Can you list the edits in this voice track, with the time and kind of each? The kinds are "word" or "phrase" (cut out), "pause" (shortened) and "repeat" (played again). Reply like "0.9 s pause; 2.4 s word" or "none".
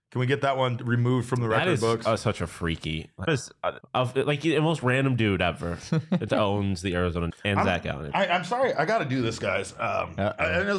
3.3 s word; 3.8 s word; 6.3 s word; 7.3 s word